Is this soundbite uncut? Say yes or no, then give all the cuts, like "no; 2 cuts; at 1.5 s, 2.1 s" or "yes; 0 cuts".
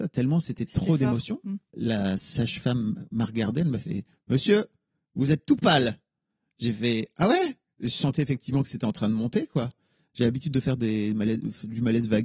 yes; 0 cuts